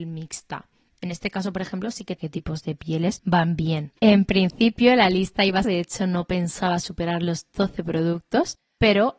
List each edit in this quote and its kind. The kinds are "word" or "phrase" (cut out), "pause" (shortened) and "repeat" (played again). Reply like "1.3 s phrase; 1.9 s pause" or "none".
2.2 s phrase; 4.0 s pause; 5.6 s phrase